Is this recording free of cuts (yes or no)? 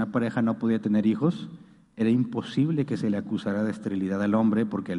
yes